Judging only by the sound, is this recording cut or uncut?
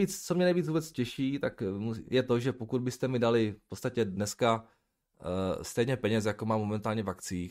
uncut